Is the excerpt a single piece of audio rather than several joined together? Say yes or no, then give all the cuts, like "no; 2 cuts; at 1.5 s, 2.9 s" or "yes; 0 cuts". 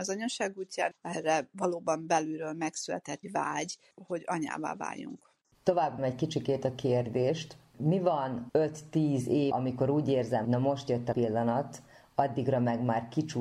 no; 8 cuts; at 0.9 s, 3.2 s, 6.0 s, 7.7 s, 8.5 s, 9.5 s, 10.4 s, 11.1 s